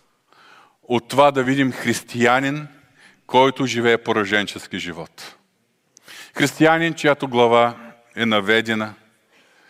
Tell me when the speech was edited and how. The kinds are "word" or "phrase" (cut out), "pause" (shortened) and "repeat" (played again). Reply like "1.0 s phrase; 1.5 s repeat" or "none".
none